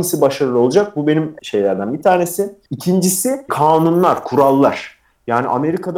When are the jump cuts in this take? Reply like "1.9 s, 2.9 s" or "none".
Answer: 1.4 s, 3.5 s